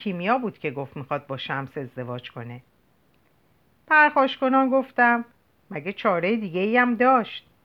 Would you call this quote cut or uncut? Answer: uncut